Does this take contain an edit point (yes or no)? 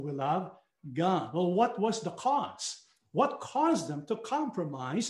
no